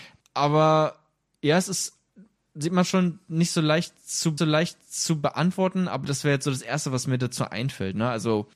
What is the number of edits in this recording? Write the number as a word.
one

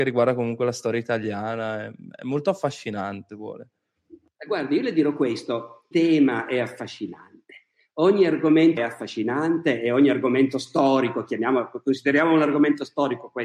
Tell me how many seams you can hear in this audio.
three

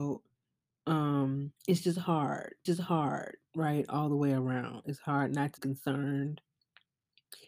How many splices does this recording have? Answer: three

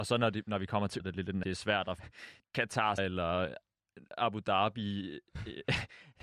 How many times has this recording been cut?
four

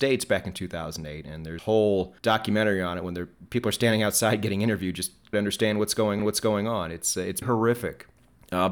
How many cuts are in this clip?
six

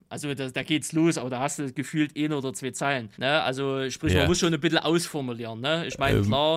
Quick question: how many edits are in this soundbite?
one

